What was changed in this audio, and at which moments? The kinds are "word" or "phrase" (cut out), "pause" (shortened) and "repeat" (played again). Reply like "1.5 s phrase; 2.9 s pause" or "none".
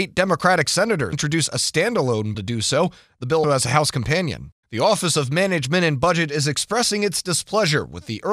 1.1 s word; 2.3 s word; 3.4 s word; 4.6 s pause